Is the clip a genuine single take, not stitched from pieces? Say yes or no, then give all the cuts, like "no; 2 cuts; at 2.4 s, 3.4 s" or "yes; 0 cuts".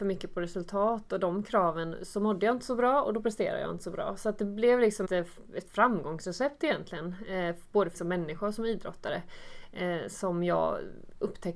no; 2 cuts; at 5.0 s, 7.9 s